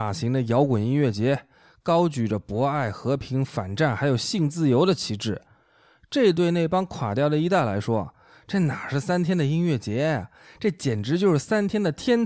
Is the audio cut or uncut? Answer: uncut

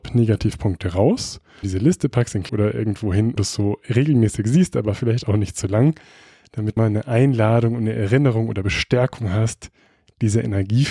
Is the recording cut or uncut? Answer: cut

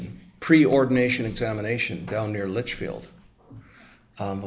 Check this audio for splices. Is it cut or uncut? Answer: uncut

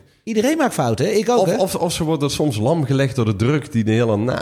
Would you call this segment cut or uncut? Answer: uncut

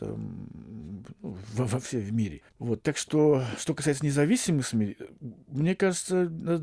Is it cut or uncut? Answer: cut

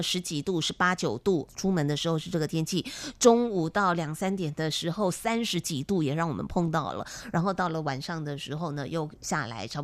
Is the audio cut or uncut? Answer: cut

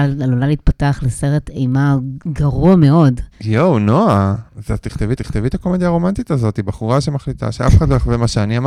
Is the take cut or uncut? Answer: cut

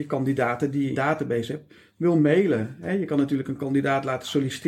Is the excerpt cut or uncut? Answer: cut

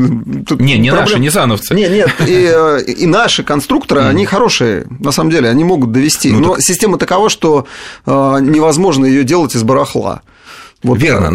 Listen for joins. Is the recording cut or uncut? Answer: uncut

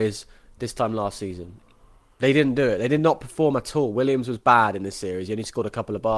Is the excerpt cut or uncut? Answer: uncut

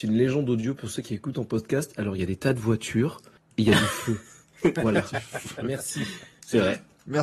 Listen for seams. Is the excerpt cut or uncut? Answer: uncut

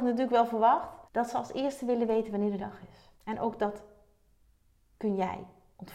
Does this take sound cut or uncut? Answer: cut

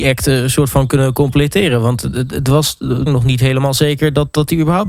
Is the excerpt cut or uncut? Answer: cut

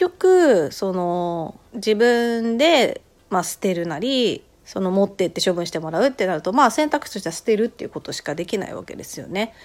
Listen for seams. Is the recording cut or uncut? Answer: cut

